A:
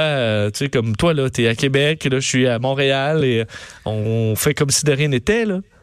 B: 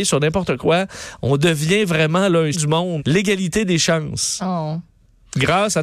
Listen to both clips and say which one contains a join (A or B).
B